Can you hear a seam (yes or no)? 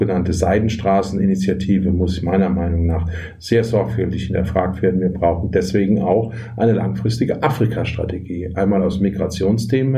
no